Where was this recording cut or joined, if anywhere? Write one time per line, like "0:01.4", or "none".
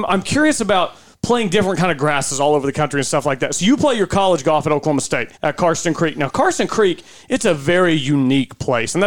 0:05.3